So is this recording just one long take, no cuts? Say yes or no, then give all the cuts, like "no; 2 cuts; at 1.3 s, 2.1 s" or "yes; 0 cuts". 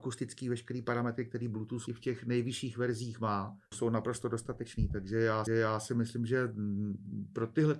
no; 3 cuts; at 1.9 s, 3.7 s, 5.5 s